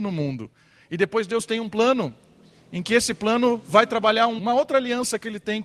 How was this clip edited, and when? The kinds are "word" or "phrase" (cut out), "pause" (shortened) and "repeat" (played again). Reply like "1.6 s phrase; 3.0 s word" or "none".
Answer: 4.4 s word